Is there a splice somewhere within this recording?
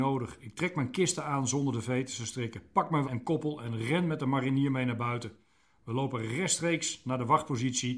yes; 1 cut; at 3.0 s

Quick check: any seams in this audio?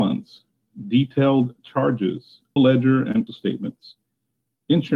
yes; 2 cuts; at 2.6 s, 3.3 s

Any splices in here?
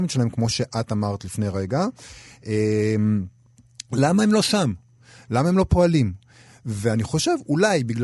no; 0 cuts

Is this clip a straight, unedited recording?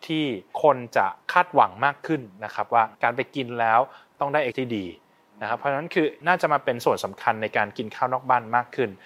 no; 3 cuts; at 2.9 s, 4.5 s, 6.2 s

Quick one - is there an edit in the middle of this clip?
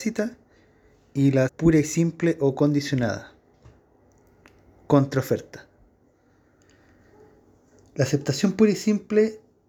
yes; 1 cut; at 1.5 s

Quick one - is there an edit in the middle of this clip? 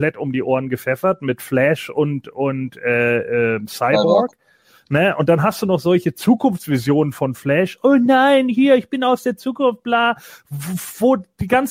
no; 0 cuts

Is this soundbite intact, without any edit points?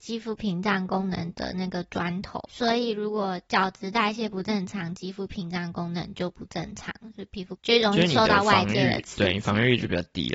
no; 1 cut; at 2.5 s

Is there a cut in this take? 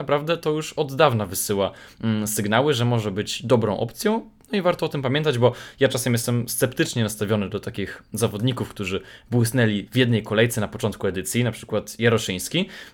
no; 0 cuts

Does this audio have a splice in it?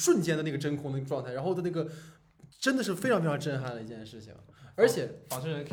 yes; 1 cut; at 2.5 s

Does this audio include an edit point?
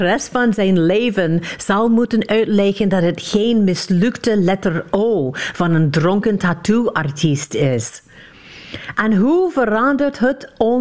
no; 0 cuts

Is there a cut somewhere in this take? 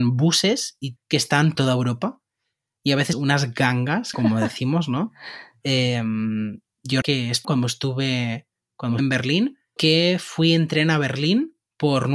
yes; 8 cuts; at 1.0 s, 1.5 s, 3.1 s, 4.1 s, 7.0 s, 7.4 s, 9.0 s, 9.8 s

